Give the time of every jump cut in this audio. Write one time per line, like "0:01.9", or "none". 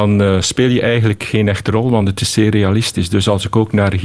none